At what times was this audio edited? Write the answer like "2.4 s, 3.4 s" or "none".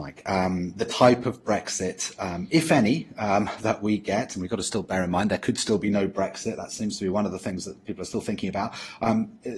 none

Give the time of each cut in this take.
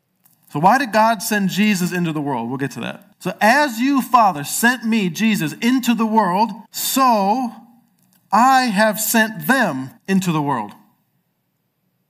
3.1 s, 6.7 s, 10.0 s

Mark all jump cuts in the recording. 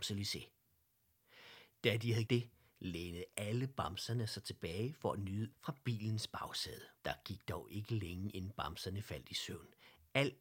2.3 s, 5.5 s, 7.0 s

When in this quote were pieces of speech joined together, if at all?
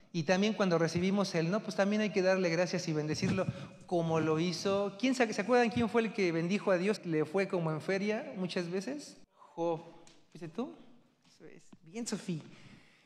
7.0 s, 9.2 s

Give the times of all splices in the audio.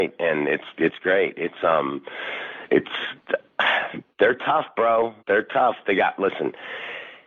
4.1 s, 5.2 s

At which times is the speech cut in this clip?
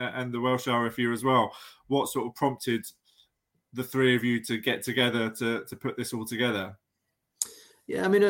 none

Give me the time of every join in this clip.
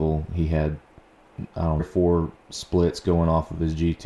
1.8 s, 2.4 s

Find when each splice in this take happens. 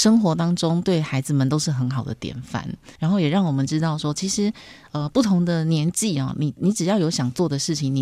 3.0 s

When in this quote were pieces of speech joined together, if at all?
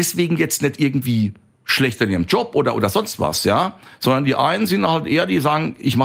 none

